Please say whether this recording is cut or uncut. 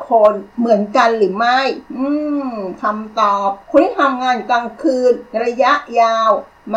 cut